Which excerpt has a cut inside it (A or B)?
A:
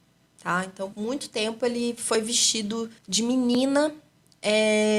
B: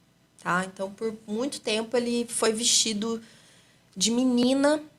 A